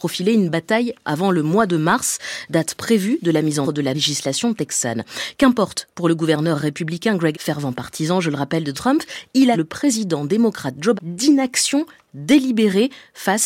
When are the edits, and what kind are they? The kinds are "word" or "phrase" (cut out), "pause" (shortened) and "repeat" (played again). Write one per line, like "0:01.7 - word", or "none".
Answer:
0:01.0 - word
0:03.6 - word
0:03.9 - word
0:07.3 - word
0:08.7 - word
0:09.5 - word
0:10.9 - word